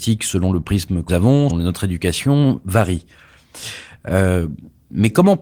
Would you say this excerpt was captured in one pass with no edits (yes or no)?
no